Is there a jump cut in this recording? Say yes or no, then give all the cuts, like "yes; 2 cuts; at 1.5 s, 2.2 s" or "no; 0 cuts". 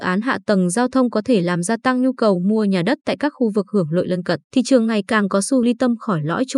yes; 2 cuts; at 4.4 s, 5.6 s